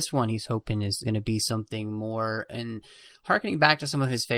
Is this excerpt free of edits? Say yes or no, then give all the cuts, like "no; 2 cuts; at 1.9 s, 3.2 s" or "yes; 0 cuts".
no; 1 cut; at 1.0 s